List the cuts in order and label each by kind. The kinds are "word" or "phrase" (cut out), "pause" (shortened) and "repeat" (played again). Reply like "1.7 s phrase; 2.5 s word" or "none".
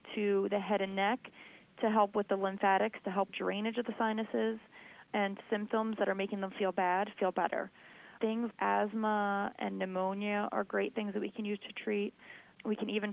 3.3 s phrase; 5.4 s phrase; 8.5 s word